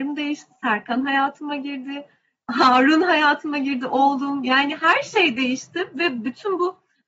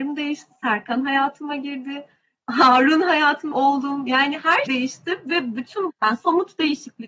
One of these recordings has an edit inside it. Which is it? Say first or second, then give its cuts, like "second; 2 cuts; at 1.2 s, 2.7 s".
second; 3 cuts; at 3.5 s, 4.7 s, 5.9 s